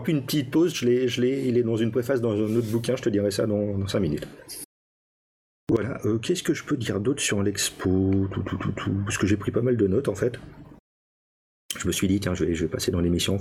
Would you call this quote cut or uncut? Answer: uncut